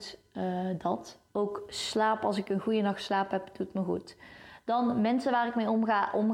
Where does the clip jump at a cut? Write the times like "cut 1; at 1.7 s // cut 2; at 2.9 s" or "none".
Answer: cut 1; at 1.3 s